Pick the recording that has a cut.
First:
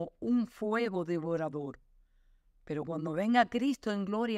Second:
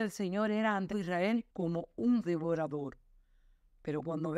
second; 3 cuts; at 0.9 s, 1.5 s, 2.2 s

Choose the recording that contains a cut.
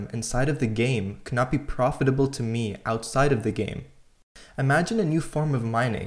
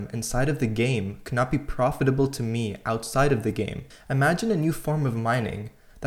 second; 1 cut; at 3.9 s

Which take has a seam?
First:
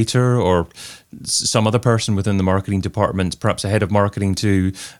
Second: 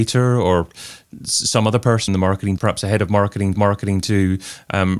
second; 3 cuts; at 2.1 s, 2.6 s, 3.5 s

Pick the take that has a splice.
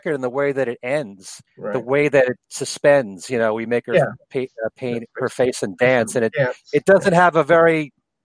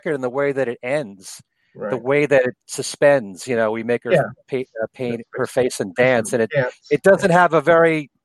first; 1 cut; at 1.5 s

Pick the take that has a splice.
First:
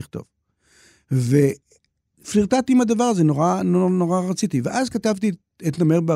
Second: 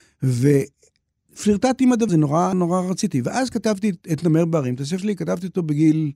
second; 4 cuts; at 2.1 s, 2.5 s, 4.0 s, 5.0 s

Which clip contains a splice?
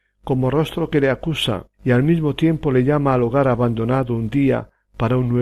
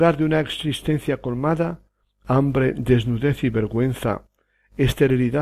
first; 1 cut; at 1.7 s

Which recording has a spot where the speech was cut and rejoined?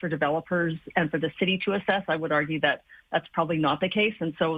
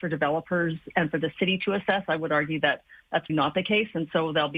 second; 1 cut; at 3.3 s

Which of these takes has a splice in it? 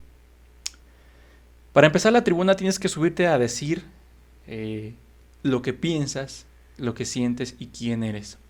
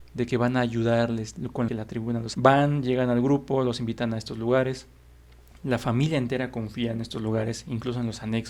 second; 2 cuts; at 1.7 s, 2.3 s

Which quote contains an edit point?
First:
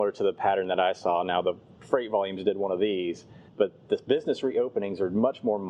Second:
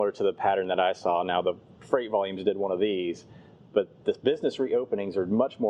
first; 1 cut; at 3.5 s

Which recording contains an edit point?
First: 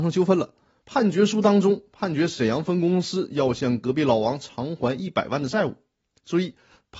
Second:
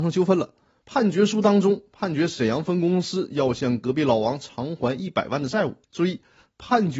second; 1 cut; at 5.8 s

